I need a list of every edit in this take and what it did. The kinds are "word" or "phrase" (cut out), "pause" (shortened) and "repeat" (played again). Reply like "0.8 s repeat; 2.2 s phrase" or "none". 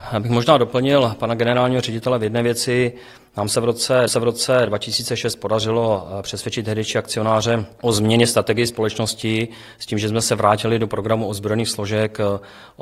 4.1 s repeat

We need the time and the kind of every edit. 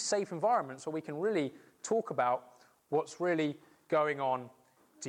none

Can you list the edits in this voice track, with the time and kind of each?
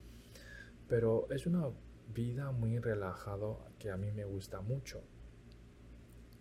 none

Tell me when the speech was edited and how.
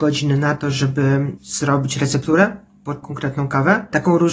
3.0 s word

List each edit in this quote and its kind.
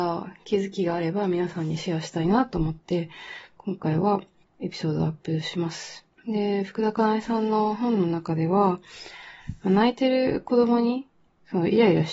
none

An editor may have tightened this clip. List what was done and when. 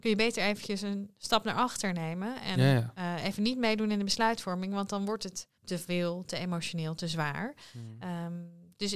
5.6 s pause

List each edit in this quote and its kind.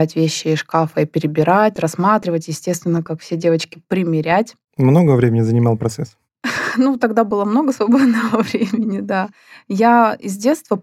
none

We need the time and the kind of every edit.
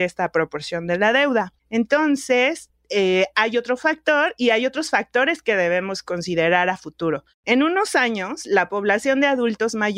1.6 s pause

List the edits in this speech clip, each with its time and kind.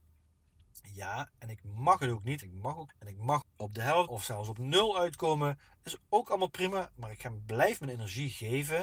2.4 s word; 2.9 s word; 3.4 s word; 4.1 s word

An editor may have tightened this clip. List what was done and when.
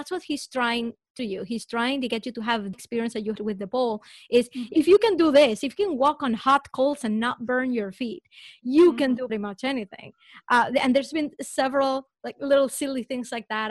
1.2 s word; 2.7 s word; 3.4 s word; 9.3 s word

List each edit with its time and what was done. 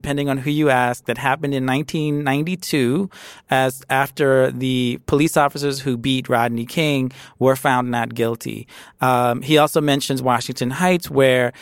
none

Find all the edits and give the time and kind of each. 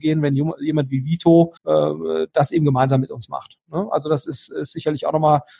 1.6 s pause

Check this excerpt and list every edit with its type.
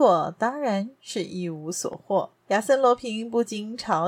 2.4 s pause

